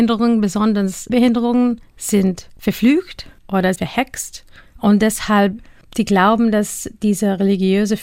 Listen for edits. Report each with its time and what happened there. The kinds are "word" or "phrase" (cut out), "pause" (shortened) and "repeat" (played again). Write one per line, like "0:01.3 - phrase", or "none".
0:01.1 - word
0:03.8 - word